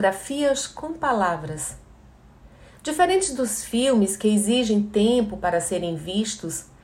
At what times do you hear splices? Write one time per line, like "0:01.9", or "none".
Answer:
none